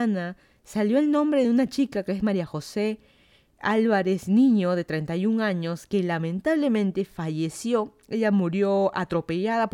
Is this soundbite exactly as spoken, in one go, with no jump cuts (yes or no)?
yes